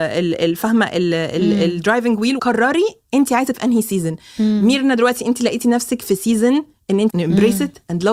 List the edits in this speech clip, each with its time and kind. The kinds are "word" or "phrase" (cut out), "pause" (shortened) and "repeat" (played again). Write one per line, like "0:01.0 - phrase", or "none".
0:02.4 - word
0:03.5 - word
0:07.1 - word